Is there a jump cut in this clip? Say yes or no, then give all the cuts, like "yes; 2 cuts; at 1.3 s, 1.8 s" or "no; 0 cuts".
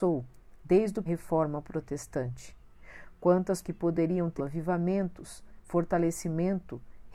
yes; 3 cuts; at 1.1 s, 3.6 s, 4.4 s